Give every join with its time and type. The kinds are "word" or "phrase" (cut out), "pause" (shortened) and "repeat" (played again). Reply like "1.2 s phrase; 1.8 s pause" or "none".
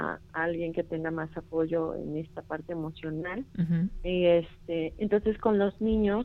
3.5 s pause